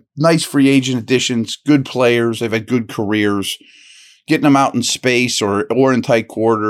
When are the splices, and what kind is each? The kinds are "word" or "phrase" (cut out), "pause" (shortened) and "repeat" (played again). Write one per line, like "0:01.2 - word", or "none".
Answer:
none